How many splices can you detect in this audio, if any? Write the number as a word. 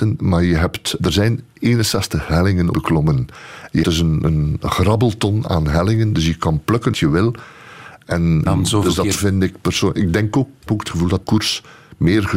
eight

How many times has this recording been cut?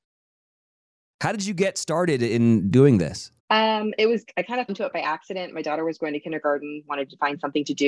two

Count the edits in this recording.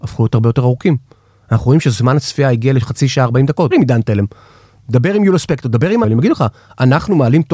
two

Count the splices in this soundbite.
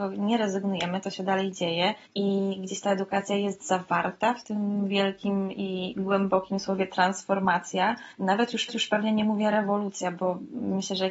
three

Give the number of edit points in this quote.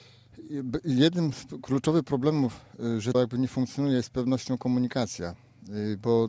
one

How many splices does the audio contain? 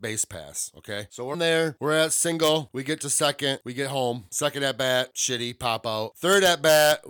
one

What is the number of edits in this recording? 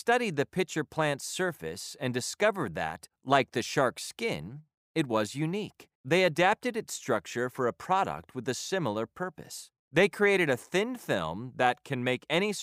two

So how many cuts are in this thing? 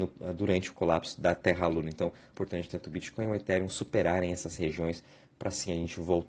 one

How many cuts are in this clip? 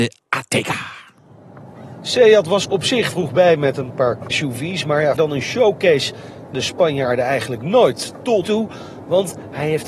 six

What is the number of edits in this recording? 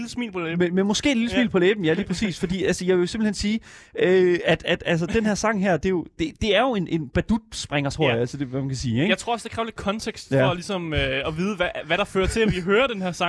one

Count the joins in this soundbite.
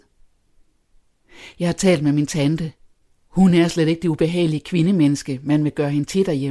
zero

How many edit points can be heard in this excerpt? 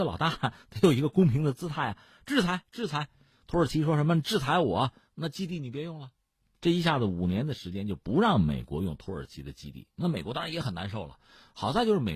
zero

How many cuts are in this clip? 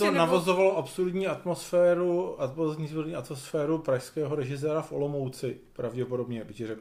zero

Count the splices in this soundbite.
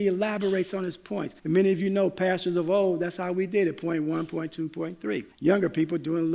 two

